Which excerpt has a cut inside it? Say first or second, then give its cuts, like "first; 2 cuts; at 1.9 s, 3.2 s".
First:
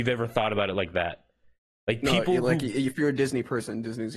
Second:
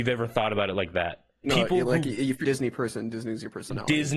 second; 2 cuts; at 1.4 s, 2.4 s